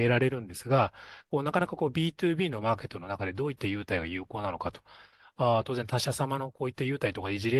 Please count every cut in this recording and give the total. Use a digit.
0